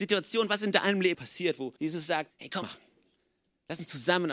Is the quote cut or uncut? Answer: cut